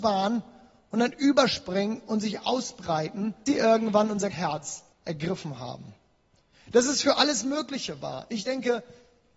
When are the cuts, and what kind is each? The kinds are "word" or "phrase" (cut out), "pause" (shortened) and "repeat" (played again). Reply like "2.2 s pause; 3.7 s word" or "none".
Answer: 3.5 s word; 4.3 s word; 4.9 s pause